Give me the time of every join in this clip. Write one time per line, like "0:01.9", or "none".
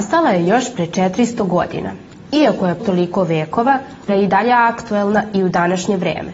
0:02.8
0:04.1